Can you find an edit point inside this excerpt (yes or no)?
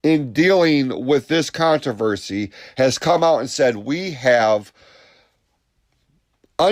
no